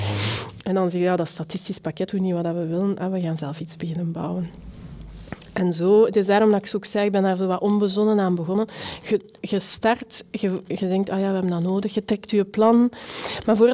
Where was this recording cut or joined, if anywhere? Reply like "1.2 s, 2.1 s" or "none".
2.1 s